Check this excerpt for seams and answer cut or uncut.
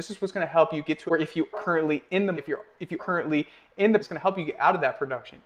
cut